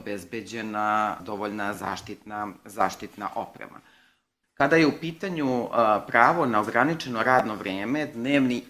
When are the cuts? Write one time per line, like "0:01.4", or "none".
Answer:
none

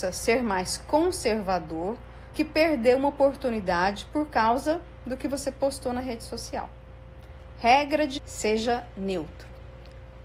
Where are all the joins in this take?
0:02.3
0:08.2

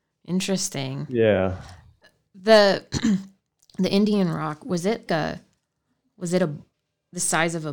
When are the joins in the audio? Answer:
0:05.1

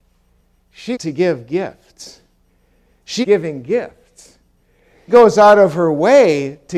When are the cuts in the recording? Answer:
0:00.9
0:03.2
0:05.1

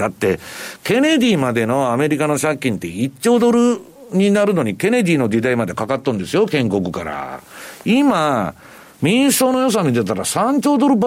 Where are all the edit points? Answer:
none

